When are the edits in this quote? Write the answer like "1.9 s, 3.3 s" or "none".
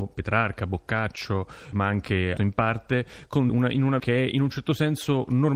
1.7 s, 2.4 s, 3.5 s, 4.0 s